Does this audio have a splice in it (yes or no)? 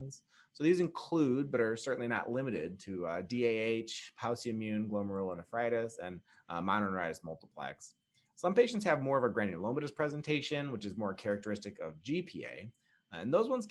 no